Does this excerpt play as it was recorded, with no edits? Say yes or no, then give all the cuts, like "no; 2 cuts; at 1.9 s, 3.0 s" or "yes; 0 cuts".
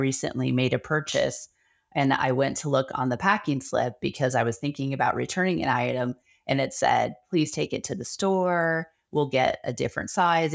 yes; 0 cuts